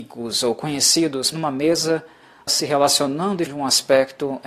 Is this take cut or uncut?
cut